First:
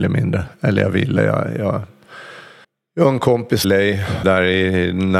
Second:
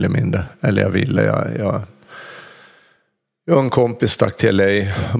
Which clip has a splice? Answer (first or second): first